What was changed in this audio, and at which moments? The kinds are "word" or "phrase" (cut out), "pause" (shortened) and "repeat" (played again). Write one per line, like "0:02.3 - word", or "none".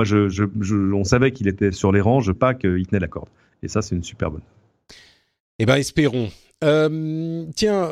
0:02.4 - word

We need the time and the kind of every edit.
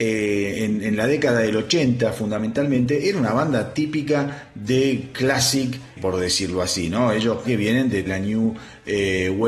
0:06.0 - word
0:07.4 - word
0:08.1 - phrase

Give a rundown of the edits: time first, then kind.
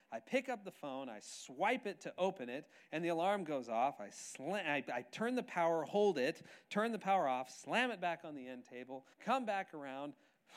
0:09.1 - pause

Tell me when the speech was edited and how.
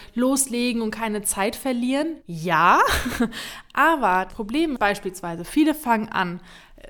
0:02.2 - pause
0:04.3 - word
0:04.8 - word

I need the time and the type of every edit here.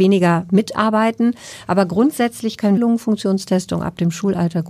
0:02.8 - phrase

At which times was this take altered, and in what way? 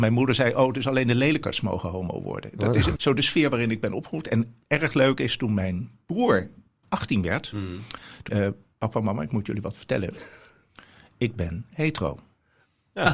0:03.0 - word
0:06.8 - word
0:08.3 - word

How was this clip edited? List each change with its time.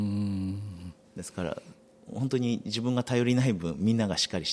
none

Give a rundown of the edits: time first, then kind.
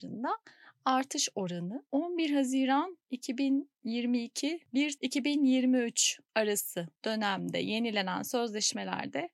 0:05.0 - word
0:07.0 - pause

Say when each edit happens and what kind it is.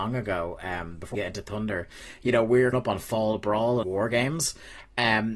0:01.1 - word
0:02.7 - word
0:03.8 - word

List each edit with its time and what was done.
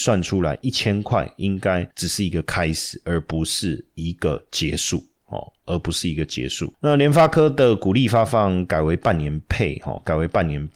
0:01.9 - pause

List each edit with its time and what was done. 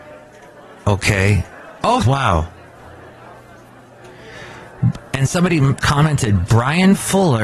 0:02.0 - phrase
0:05.8 - word

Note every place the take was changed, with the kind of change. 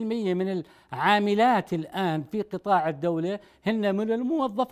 none

